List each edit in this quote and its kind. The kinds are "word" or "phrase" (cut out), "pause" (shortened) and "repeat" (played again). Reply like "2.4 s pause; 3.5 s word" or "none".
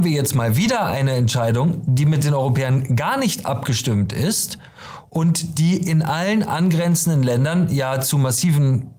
none